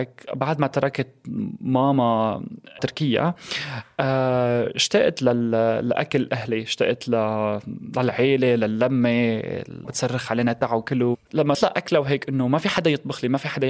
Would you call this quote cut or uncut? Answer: cut